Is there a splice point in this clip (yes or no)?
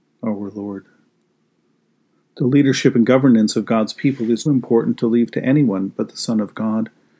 yes